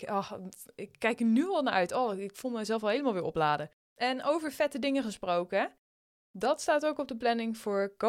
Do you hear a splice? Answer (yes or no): yes